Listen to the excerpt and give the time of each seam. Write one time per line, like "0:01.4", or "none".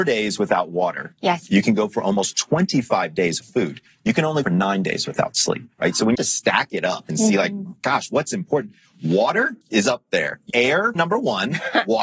0:03.4
0:04.4
0:05.7
0:06.1
0:09.6
0:10.5
0:10.9